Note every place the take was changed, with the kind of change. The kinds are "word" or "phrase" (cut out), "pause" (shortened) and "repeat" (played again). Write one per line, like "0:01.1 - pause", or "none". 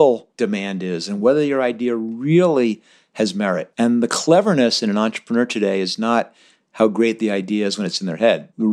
none